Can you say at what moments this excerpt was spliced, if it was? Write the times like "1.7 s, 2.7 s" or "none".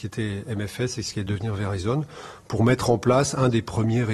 none